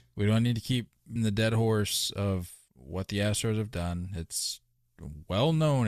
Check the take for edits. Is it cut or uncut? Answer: cut